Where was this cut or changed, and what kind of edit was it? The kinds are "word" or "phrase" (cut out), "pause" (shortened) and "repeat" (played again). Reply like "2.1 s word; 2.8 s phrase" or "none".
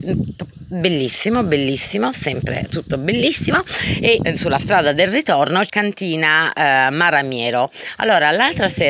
4.2 s word; 5.7 s phrase